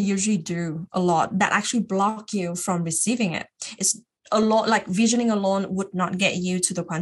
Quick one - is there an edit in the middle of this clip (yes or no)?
no